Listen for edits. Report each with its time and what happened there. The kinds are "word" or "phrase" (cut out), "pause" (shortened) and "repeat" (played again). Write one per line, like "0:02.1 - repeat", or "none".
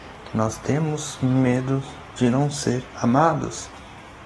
none